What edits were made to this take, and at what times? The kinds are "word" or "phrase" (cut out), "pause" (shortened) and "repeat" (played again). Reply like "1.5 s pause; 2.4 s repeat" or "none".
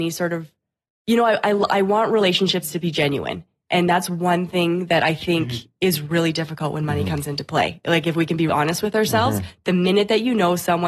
8.5 s word